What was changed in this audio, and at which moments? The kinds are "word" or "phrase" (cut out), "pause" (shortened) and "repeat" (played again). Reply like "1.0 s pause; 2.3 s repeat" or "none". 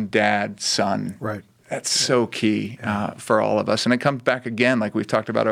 none